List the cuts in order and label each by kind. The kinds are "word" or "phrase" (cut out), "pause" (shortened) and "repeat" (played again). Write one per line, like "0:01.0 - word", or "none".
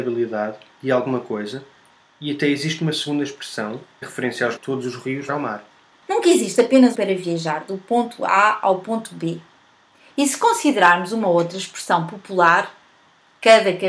0:04.0 - word
0:04.6 - phrase
0:05.3 - phrase
0:06.9 - phrase